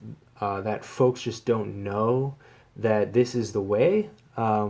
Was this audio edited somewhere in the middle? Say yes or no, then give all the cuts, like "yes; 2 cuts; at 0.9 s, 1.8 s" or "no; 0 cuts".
no; 0 cuts